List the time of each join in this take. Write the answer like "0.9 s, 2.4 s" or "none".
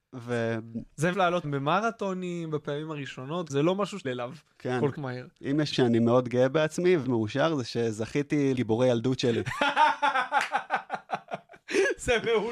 1.1 s, 1.4 s, 3.5 s, 4.0 s, 4.9 s, 5.7 s, 7.0 s, 8.5 s

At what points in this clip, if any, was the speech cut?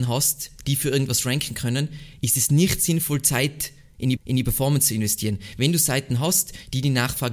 4.2 s

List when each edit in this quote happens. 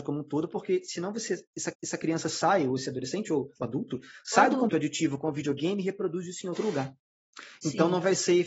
1.7 s, 3.6 s, 4.7 s

